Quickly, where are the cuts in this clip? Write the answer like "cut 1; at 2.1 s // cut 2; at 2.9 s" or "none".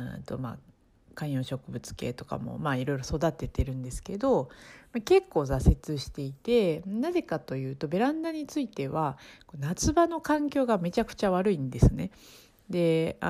none